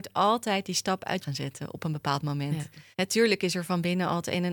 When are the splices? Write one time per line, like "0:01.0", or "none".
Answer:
0:01.2
0:02.9